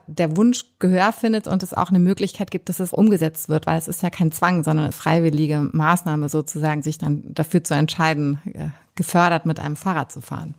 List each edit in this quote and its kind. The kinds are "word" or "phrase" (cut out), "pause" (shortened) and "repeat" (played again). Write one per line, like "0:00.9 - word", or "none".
0:02.9 - word
0:04.9 - phrase